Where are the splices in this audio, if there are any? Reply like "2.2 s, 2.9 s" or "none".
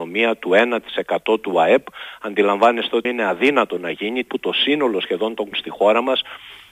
3.0 s, 4.3 s, 5.5 s